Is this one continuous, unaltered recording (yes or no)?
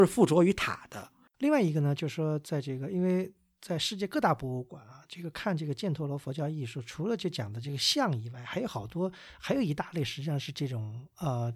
yes